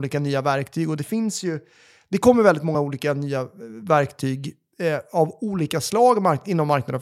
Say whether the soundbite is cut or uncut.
uncut